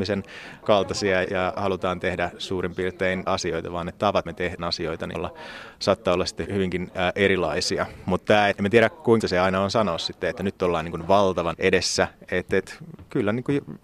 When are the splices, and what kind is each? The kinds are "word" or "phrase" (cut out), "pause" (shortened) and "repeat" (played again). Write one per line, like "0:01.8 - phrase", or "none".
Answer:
0:01.2 - word
0:03.3 - word
0:04.3 - word
0:04.6 - word
0:05.1 - word
0:06.4 - word
0:08.5 - word
0:09.2 - word
0:11.5 - word